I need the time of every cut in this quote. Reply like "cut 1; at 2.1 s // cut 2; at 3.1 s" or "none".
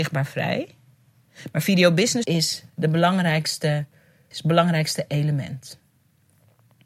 cut 1; at 2.2 s // cut 2; at 4.3 s